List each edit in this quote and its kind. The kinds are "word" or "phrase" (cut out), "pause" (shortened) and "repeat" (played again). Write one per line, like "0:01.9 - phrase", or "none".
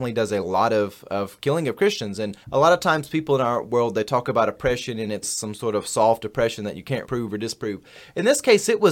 0:02.4 - pause
0:05.2 - word
0:07.0 - word